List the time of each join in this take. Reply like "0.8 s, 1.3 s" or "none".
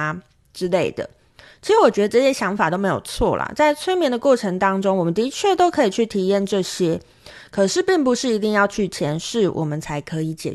none